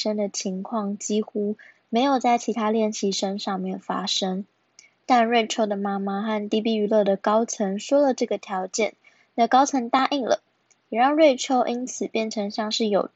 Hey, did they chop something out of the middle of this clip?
no; 0 cuts

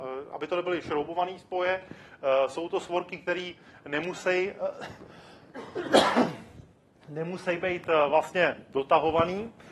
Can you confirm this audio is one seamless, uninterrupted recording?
yes; 0 cuts

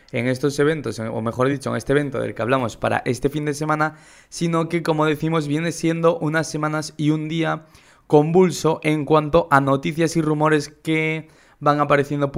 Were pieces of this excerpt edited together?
no; 0 cuts

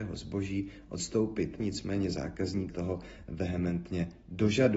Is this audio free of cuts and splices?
no; 2 cuts; at 1.6 s, 2.7 s

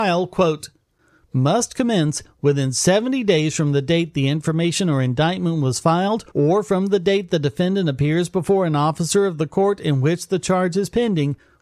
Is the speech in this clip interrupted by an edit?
yes; 1 cut; at 6.3 s

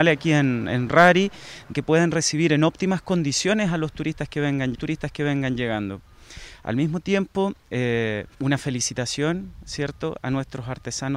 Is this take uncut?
no; 3 cuts; at 1.7 s, 4.7 s, 8.3 s

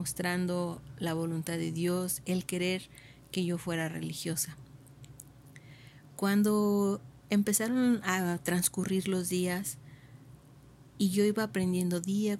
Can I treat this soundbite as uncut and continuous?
yes; 0 cuts

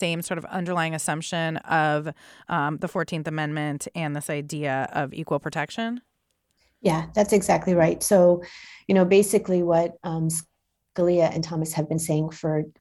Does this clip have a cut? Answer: no; 0 cuts

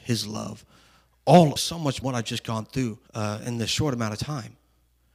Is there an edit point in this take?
yes; 3 cuts; at 1.6 s, 2.0 s, 3.1 s

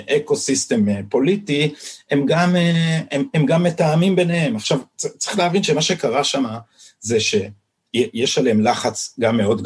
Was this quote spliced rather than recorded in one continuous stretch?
no; 0 cuts

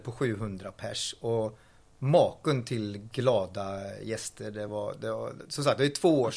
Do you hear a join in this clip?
no; 0 cuts

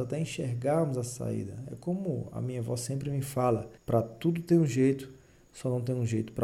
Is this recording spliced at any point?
yes; 1 cut; at 3.8 s

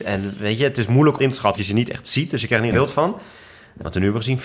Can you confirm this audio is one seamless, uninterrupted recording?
no; 3 cuts; at 1.2 s, 1.6 s, 2.7 s

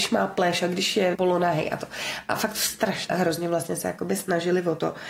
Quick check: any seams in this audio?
yes; 2 cuts; at 1.1 s, 3.1 s

